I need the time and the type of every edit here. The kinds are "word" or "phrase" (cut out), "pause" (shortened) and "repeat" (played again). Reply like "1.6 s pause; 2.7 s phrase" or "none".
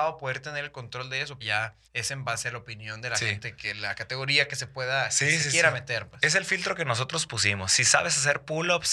1.4 s word; 1.9 s pause